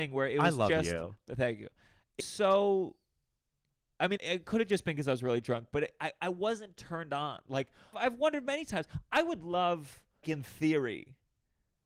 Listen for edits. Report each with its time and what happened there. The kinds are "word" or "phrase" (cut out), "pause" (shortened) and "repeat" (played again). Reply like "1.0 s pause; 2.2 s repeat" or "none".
2.2 s word; 4.2 s word; 7.9 s word; 10.2 s word